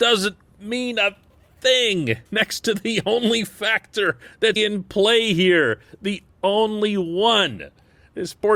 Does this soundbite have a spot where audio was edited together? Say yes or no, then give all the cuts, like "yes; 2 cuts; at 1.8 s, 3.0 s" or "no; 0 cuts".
yes; 2 cuts; at 2.3 s, 4.6 s